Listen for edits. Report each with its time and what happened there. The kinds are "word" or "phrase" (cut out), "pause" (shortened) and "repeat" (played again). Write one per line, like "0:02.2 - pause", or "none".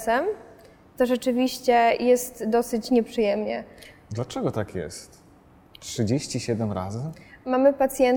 none